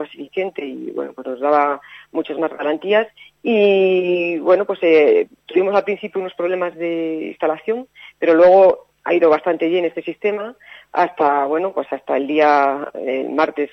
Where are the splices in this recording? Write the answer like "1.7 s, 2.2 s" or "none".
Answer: none